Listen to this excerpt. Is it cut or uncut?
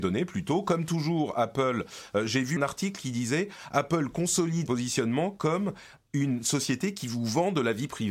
cut